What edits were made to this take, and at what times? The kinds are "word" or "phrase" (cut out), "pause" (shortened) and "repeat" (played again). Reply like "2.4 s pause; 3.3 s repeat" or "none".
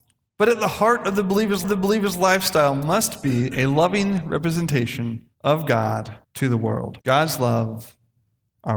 1.6 s repeat; 5.3 s pause; 6.2 s pause; 7.0 s pause